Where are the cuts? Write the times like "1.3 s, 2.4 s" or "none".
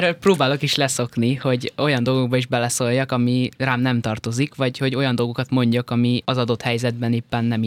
none